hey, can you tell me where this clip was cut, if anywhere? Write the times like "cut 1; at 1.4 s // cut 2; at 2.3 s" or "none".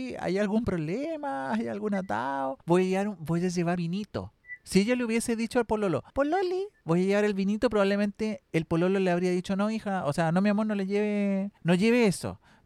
cut 1; at 2.6 s // cut 2; at 3.8 s // cut 3; at 6.1 s // cut 4; at 11.6 s